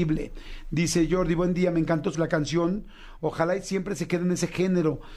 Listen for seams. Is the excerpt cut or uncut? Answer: cut